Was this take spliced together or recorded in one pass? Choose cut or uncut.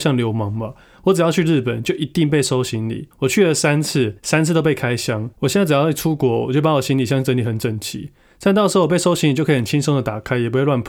cut